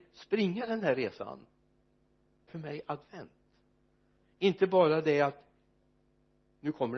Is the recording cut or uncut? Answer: cut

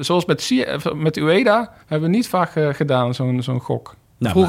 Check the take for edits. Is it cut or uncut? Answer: cut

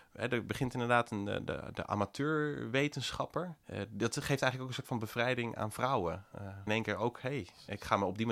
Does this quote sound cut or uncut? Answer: cut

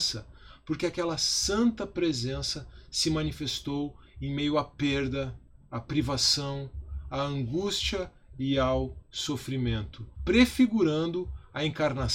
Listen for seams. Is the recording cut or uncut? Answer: cut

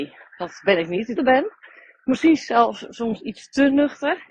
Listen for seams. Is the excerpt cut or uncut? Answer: cut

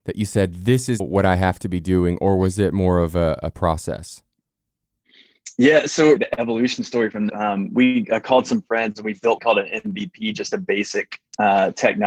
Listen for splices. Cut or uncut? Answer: cut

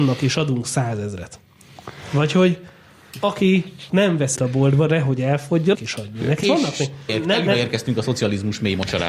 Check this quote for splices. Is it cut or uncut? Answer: cut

